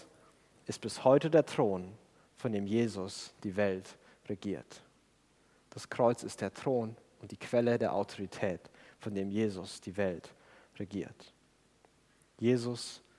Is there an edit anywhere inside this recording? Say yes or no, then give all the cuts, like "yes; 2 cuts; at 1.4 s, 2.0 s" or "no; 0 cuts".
no; 0 cuts